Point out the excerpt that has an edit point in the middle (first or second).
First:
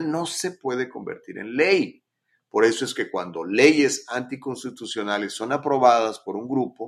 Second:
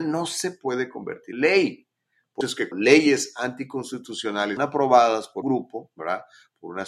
second